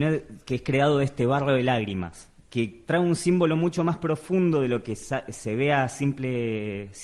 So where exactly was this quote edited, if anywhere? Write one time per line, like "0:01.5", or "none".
0:02.4